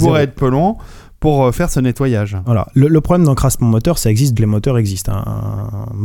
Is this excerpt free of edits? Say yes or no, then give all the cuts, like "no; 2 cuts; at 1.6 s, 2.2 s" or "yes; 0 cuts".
no; 1 cut; at 4.4 s